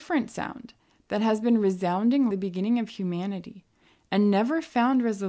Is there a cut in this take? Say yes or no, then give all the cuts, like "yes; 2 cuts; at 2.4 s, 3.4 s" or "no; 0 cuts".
yes; 1 cut; at 2.3 s